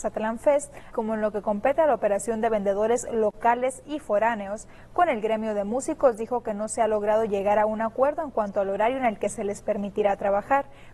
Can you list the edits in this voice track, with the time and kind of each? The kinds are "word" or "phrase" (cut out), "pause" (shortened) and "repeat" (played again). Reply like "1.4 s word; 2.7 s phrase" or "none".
0.9 s word